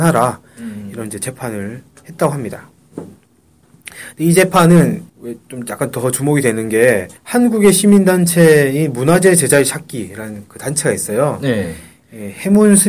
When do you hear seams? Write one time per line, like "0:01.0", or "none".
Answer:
0:05.1
0:07.2